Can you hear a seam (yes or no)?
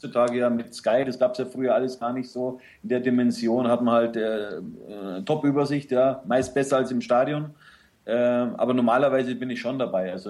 no